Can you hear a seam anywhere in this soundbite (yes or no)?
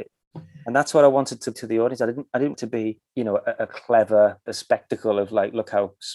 yes